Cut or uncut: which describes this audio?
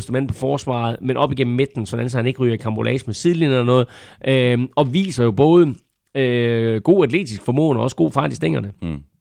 uncut